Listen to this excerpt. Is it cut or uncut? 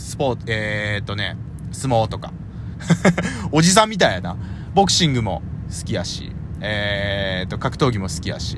uncut